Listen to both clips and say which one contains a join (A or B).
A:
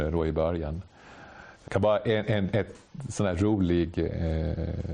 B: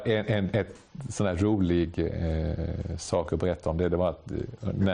A